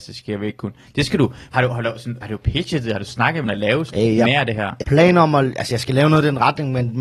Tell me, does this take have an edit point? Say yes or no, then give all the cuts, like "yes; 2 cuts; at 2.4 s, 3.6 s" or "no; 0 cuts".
yes; 6 cuts; at 1.5 s, 2.2 s, 3.1 s, 3.4 s, 3.9 s, 4.8 s